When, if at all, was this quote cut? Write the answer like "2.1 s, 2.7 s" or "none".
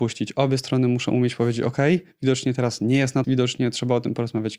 3.2 s